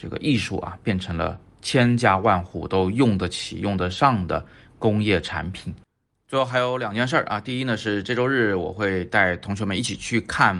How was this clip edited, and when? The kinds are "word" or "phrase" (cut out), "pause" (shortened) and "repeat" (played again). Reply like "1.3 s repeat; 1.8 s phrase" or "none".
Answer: none